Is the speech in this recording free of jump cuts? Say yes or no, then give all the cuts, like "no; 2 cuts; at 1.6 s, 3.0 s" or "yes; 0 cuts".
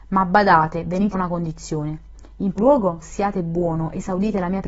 no; 3 cuts; at 1.1 s, 2.6 s, 3.0 s